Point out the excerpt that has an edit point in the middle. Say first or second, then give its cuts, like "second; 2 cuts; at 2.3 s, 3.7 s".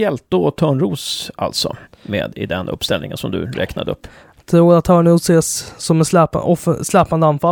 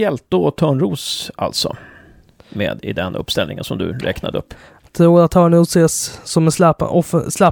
first; 1 cut; at 1.8 s